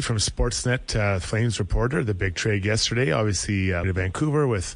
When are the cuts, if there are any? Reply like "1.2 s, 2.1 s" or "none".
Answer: 3.8 s